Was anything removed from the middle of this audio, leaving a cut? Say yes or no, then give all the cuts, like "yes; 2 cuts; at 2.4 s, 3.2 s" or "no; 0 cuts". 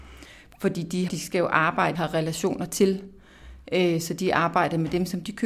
yes; 2 cuts; at 1.1 s, 1.9 s